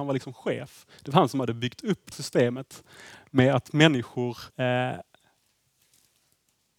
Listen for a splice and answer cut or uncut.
cut